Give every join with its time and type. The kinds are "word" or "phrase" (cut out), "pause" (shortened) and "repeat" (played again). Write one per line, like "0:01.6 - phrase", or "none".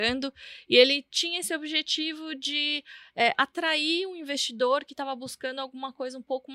none